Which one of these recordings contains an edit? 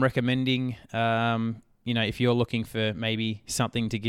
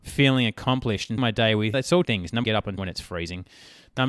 second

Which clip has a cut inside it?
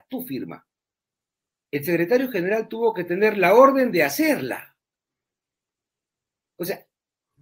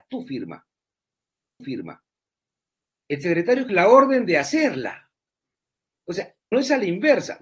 second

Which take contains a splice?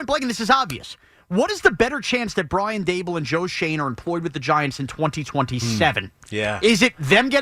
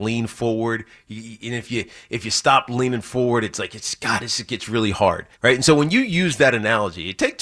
second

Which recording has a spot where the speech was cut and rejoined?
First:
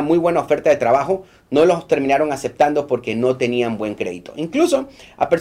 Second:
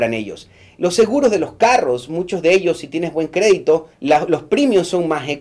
second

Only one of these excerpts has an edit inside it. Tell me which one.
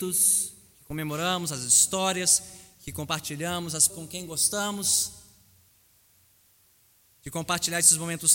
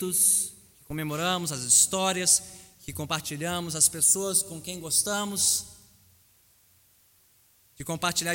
first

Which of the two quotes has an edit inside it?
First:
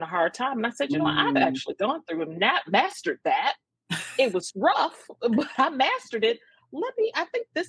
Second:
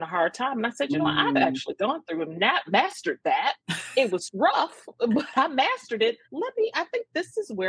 second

